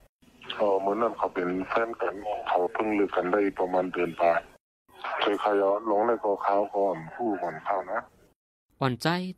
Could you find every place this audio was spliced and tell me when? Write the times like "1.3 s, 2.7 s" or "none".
none